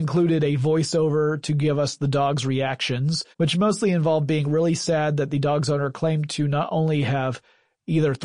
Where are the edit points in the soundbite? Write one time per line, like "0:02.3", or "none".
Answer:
0:03.3